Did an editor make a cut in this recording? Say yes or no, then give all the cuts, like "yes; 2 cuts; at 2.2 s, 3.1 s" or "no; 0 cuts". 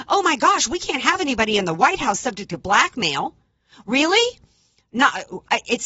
no; 0 cuts